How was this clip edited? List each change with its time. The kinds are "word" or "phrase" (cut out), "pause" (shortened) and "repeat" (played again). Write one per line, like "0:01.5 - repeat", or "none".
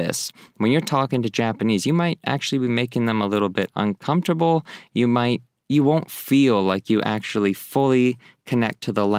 none